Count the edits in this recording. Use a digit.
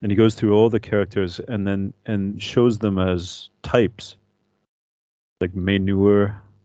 0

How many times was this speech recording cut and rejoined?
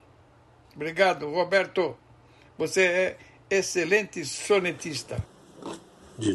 0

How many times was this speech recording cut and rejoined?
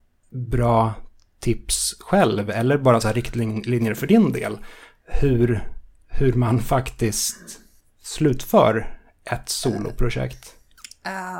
0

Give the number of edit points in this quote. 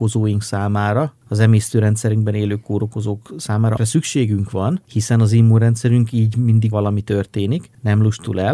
2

